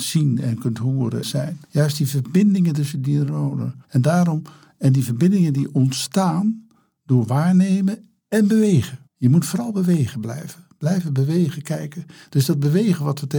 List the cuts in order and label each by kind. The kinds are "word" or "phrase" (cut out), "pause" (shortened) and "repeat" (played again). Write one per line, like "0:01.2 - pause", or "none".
0:01.2 - phrase
0:01.6 - pause
0:03.8 - pause
0:09.1 - pause

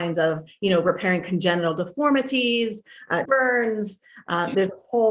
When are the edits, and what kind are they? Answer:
0:03.3 - word

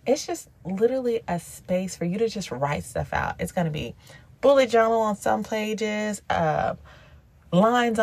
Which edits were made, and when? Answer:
none

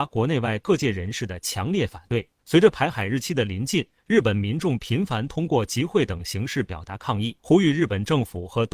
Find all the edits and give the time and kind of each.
0:02.4 - pause
0:07.4 - pause

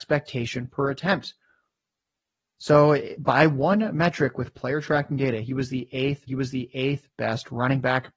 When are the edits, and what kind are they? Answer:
0:06.3 - repeat

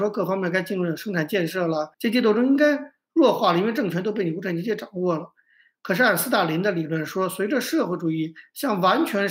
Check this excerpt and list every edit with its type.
0:01.9 - pause

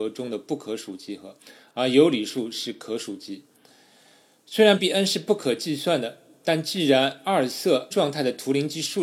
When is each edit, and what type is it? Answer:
0:04.8 - word
0:07.9 - word

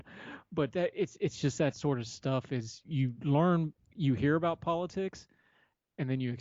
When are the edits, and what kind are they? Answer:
0:02.8 - word

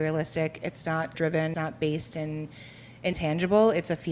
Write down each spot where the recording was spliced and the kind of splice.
0:01.1 - word
0:01.5 - word
0:03.1 - word

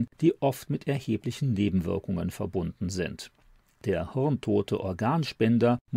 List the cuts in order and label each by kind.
none

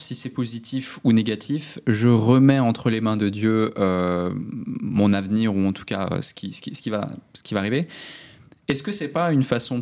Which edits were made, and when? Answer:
none

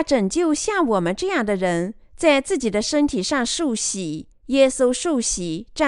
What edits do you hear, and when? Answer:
0:02.0 - pause
0:04.3 - pause

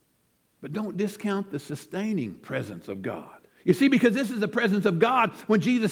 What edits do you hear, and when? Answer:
0:03.5 - pause

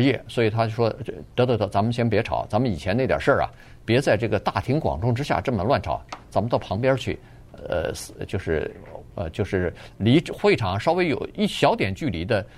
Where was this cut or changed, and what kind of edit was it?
none

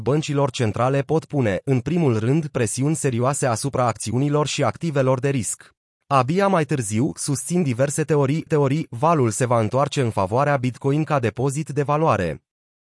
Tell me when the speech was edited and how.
0:05.8 - pause
0:08.5 - repeat

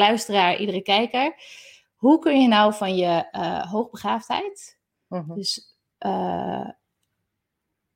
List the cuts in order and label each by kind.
none

